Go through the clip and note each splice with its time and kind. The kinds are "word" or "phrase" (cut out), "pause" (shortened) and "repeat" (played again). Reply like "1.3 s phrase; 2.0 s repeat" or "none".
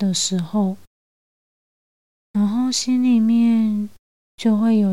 none